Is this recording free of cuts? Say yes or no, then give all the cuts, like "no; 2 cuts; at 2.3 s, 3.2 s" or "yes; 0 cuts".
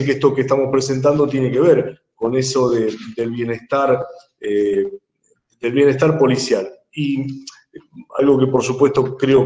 yes; 0 cuts